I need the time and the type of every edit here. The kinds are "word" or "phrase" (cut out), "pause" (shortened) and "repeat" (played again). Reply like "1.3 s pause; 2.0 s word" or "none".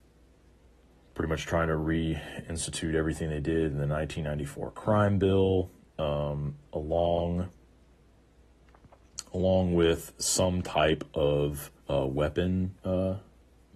6.7 s pause; 11.8 s pause; 12.8 s pause